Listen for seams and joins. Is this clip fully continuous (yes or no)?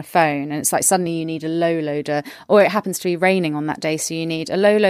yes